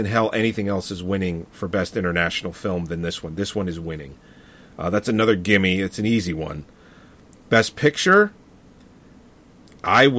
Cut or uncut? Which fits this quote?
uncut